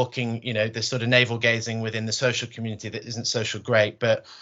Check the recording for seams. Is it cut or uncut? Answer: uncut